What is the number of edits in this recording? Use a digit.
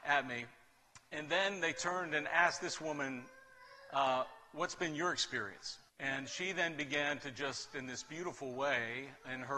1